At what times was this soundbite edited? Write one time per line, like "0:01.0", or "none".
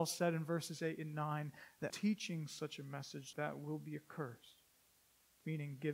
0:01.9
0:03.3